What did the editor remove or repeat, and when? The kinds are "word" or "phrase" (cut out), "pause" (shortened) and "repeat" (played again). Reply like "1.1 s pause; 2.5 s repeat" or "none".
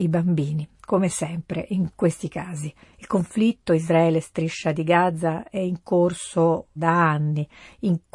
6.8 s word

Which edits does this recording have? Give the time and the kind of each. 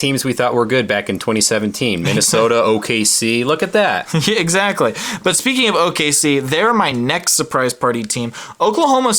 none

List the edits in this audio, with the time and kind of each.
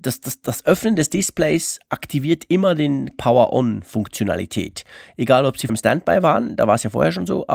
3.1 s word; 5.7 s word

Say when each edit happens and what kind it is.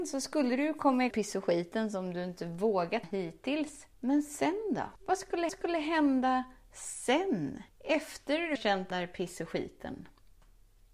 1.1 s phrase; 3.0 s word; 3.9 s pause; 5.0 s pause; 5.5 s repeat; 7.7 s pause; 8.6 s word; 8.9 s word

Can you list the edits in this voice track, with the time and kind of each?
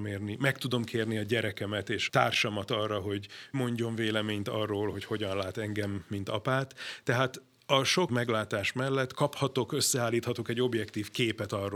2.1 s word; 3.5 s word; 8.1 s word; 9.1 s word

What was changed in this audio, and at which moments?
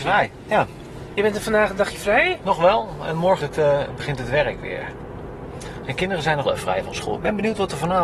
3.4 s word; 6.4 s word

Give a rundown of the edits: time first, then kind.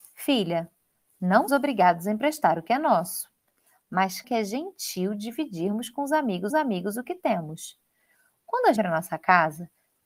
1.5 s word; 4.2 s word; 6.5 s repeat; 8.8 s phrase

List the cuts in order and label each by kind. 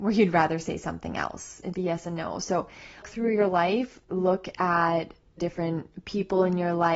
1.7 s phrase; 3.0 s word; 4.0 s pause; 5.4 s phrase

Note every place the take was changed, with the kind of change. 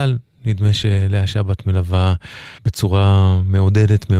2.6 s pause

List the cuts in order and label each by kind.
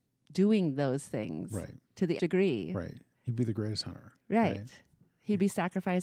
1.8 s pause; 2.2 s word; 4.2 s pause

